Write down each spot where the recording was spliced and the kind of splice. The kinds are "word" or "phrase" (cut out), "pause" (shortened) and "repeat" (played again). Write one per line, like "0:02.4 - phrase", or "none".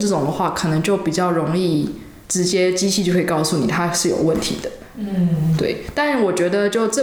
0:02.2 - pause